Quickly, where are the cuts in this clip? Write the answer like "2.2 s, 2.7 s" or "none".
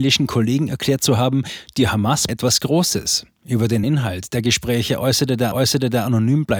2.3 s, 3.8 s, 5.5 s